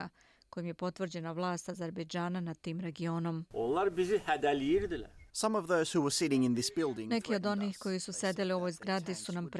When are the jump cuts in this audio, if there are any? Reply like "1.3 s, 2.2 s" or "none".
5.3 s